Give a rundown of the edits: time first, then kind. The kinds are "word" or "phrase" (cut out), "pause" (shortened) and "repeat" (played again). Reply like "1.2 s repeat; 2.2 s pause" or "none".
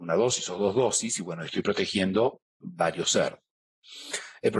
2.5 s pause

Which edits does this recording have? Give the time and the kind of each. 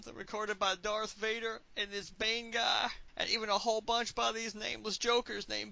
3.1 s pause

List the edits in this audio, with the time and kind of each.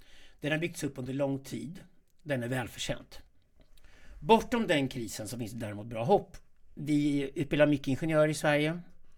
none

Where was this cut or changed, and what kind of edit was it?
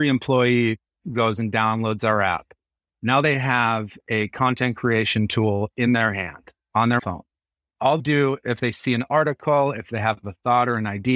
7.0 s word; 8.0 s word

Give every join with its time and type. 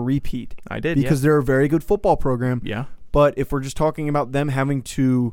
none

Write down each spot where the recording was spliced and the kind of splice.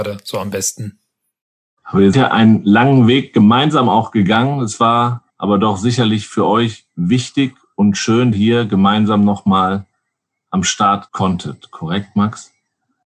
2.1 s word; 5.3 s pause; 8.3 s phrase; 11.1 s word

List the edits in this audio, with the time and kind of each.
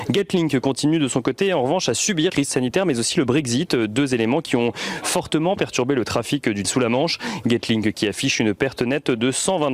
2.3 s word; 6.6 s word

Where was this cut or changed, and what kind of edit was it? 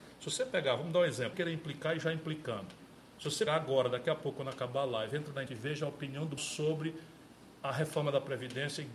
1.3 s word; 3.5 s word; 5.5 s word; 6.4 s word

